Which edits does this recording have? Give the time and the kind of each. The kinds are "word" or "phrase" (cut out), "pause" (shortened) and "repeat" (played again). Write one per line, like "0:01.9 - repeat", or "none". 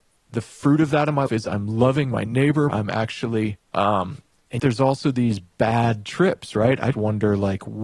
0:01.3 - word
0:02.7 - word
0:03.6 - pause
0:04.6 - word
0:06.9 - word